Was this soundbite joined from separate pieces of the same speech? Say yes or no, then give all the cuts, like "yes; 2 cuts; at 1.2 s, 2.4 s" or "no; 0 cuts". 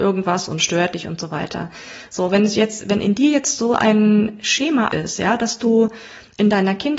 yes; 1 cut; at 4.9 s